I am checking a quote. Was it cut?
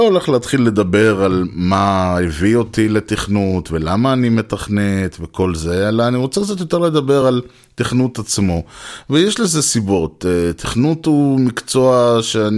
no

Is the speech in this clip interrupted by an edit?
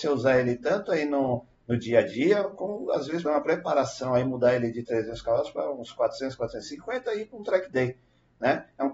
yes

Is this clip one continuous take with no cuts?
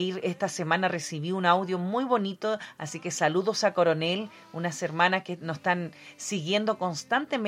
yes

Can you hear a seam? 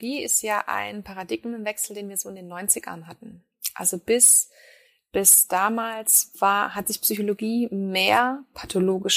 no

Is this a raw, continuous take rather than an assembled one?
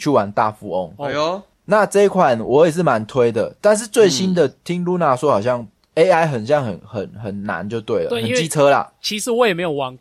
yes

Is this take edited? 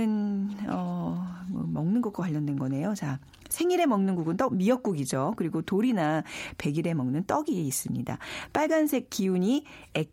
no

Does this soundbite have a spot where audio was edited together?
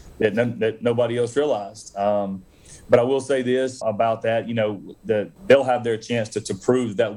yes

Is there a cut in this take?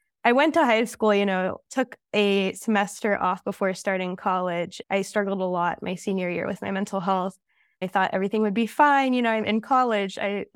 yes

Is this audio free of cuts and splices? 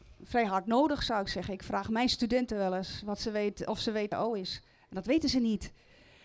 no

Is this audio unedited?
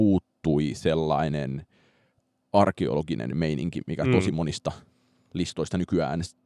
yes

